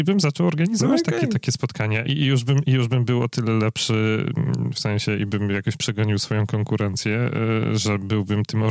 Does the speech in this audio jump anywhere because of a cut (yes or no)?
yes